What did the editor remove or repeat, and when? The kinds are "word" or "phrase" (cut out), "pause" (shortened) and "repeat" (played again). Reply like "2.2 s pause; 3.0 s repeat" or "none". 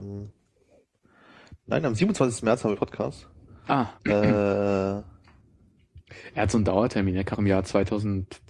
2.7 s phrase; 4.0 s pause; 7.3 s word